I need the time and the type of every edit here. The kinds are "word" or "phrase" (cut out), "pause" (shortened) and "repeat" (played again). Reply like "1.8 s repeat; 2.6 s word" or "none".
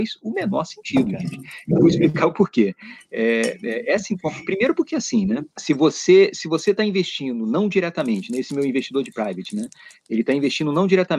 5.5 s pause